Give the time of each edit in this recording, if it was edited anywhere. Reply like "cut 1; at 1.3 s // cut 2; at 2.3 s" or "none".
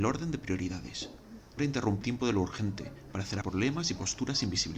cut 1; at 1.6 s // cut 2; at 2.0 s // cut 3; at 3.4 s